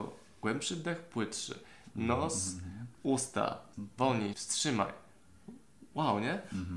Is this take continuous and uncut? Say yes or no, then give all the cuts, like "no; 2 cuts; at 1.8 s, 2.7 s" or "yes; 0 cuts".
no; 2 cuts; at 3.7 s, 4.3 s